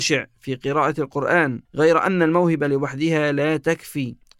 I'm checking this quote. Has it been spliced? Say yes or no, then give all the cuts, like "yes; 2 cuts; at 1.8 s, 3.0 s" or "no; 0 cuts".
yes; 1 cut; at 1.7 s